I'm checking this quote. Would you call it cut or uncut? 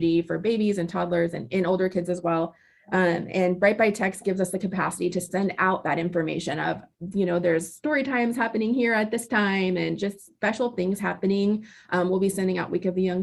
uncut